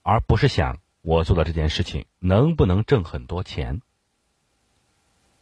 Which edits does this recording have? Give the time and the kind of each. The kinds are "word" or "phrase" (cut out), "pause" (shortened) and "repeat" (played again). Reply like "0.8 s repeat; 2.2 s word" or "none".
0.9 s pause